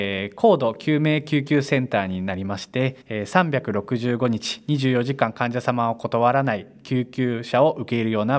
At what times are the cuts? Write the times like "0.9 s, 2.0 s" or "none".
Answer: 3.0 s